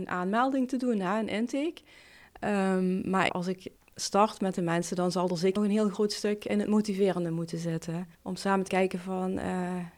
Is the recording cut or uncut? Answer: cut